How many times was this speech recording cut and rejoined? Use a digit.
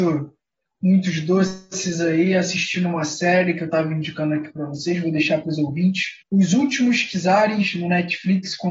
1